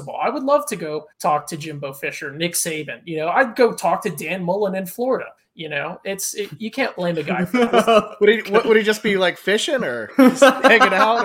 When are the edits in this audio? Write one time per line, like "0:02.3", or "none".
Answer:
0:01.1
0:05.4